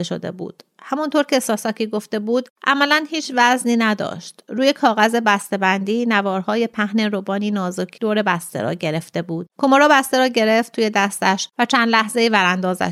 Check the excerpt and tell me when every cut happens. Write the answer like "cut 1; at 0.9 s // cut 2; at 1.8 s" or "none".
cut 1; at 9.5 s